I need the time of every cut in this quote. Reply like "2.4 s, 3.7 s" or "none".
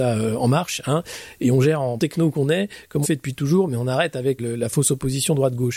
2.0 s, 3.0 s, 4.4 s